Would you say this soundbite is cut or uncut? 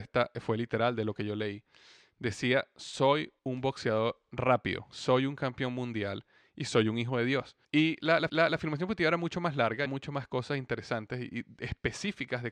cut